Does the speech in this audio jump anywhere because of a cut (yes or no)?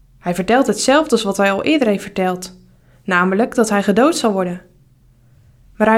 no